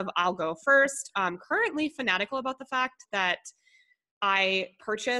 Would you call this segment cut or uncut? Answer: uncut